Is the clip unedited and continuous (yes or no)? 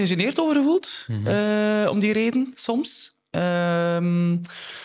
yes